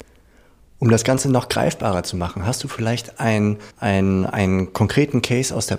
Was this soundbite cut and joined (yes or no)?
yes